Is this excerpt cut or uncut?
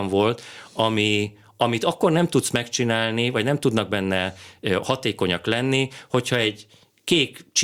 uncut